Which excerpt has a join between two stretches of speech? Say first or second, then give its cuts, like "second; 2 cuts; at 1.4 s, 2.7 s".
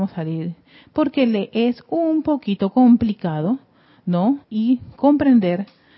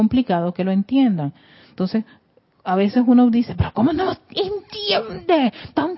first; 1 cut; at 4.4 s